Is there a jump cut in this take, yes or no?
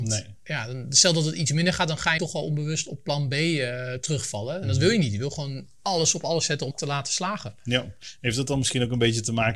yes